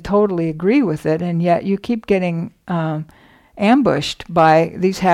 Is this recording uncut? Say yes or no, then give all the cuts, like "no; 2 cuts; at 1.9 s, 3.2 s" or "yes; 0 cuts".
yes; 0 cuts